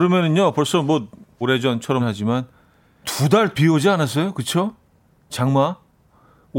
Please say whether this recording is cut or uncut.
cut